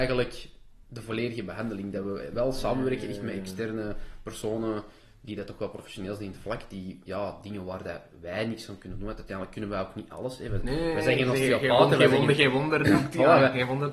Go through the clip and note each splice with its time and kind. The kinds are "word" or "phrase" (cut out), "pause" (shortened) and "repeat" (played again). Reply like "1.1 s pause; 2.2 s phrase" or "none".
none